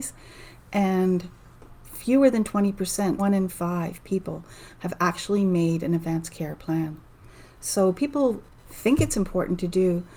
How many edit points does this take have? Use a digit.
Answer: 1